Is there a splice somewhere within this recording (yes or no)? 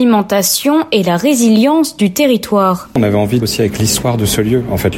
yes